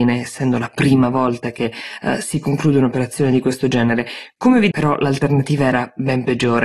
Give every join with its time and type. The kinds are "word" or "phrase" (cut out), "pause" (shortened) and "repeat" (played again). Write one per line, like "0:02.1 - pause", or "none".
0:04.7 - word